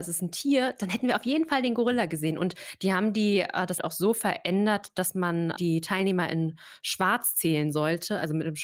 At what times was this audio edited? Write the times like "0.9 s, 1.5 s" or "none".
3.8 s